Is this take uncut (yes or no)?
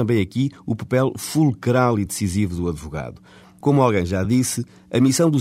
yes